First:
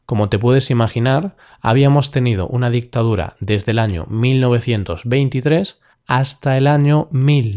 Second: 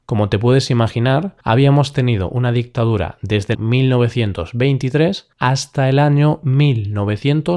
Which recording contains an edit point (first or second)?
second